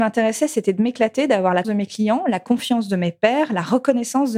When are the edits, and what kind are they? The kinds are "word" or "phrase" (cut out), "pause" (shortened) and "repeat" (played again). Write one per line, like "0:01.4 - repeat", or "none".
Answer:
0:01.6 - word